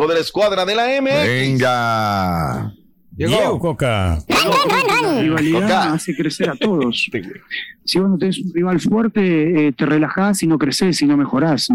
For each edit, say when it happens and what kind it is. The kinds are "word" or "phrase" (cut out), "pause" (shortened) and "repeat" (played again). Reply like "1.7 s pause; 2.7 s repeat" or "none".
none